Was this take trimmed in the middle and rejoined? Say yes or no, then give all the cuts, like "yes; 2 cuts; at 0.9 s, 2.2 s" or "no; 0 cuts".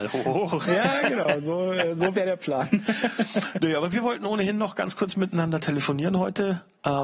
no; 0 cuts